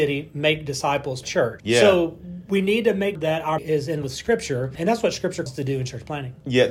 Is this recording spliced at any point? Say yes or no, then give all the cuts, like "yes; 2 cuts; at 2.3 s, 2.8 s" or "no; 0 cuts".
yes; 7 cuts; at 1.2 s, 1.6 s, 3.1 s, 3.6 s, 4.0 s, 4.7 s, 5.5 s